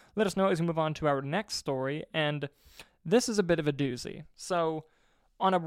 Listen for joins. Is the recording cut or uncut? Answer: uncut